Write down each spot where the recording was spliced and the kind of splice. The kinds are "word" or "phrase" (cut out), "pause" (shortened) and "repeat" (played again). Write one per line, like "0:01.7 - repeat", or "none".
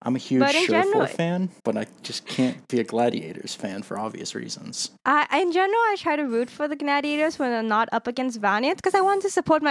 0:01.6 - pause
0:05.0 - pause